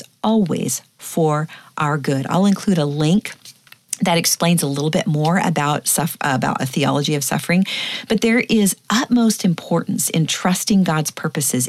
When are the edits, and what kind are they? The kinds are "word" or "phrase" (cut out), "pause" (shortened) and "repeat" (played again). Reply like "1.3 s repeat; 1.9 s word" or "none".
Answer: none

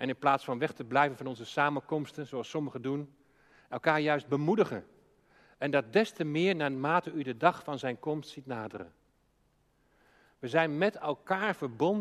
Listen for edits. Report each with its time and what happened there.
none

